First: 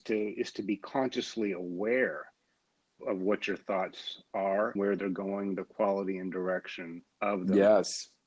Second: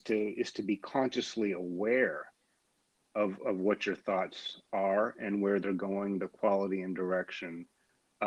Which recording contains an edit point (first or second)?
first